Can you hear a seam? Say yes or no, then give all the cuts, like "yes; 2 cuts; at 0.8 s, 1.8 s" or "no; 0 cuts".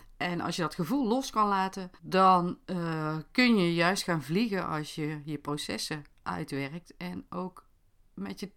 yes; 1 cut; at 2.0 s